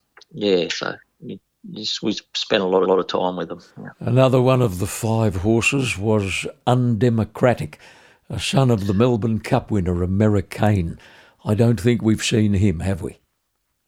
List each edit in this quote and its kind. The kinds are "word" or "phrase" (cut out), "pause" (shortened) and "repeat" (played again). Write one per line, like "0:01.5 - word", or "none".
0:02.8 - repeat
0:03.7 - pause